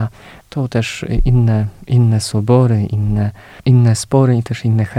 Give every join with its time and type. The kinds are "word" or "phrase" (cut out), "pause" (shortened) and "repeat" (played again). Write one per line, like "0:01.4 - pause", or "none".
0:03.6 - pause